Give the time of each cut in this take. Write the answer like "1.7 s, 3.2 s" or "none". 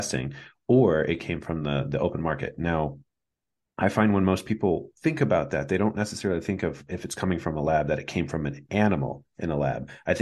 none